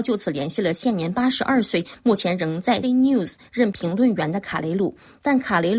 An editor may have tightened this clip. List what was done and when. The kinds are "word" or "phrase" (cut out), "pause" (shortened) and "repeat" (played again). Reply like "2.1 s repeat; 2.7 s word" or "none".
2.8 s word